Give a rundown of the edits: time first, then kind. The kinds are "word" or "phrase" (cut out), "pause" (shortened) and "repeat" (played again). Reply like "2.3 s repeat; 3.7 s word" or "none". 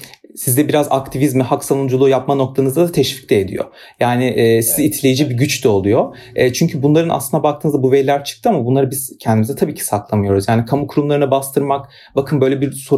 none